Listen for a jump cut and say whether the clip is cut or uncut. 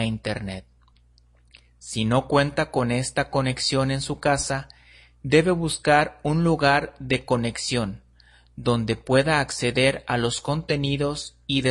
uncut